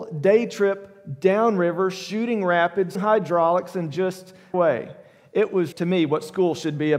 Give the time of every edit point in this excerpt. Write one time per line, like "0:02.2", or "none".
0:02.9
0:04.5
0:05.7